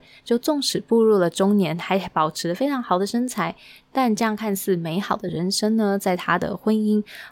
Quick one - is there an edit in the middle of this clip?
no; 0 cuts

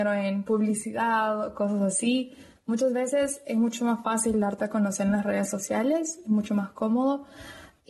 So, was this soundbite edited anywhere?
no; 0 cuts

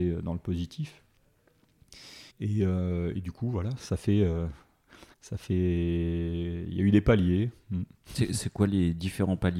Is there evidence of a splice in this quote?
yes; 4 cuts; at 2.3 s, 3.8 s, 5.1 s, 7.9 s

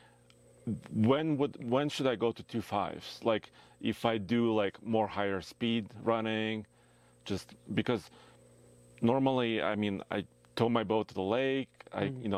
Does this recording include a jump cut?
no; 0 cuts

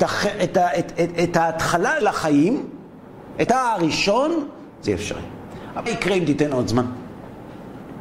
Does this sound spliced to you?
yes; 4 cuts; at 2.0 s, 3.5 s, 4.9 s, 5.9 s

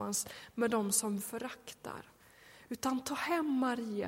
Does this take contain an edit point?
yes; 1 cut; at 1.2 s

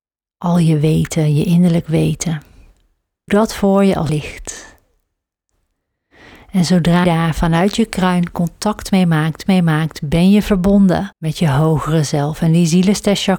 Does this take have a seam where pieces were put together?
yes; 5 cuts; at 3.3 s, 4.1 s, 7.0 s, 9.5 s, 11.1 s

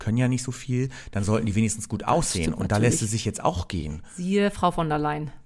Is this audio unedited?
yes; 0 cuts

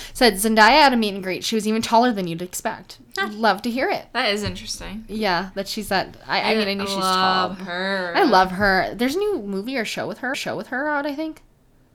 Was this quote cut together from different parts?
yes; 1 cut; at 10.3 s

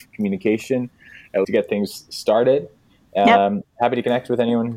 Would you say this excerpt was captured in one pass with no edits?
no; 1 cut; at 1.4 s

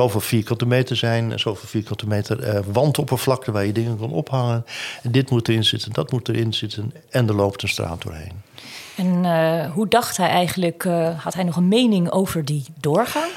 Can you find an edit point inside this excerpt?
no; 0 cuts

